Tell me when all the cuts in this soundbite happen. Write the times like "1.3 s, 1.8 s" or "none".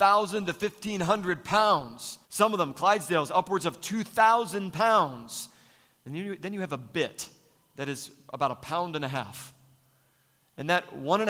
2.2 s